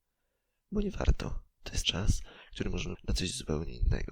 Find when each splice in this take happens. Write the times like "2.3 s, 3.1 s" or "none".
1.8 s, 2.9 s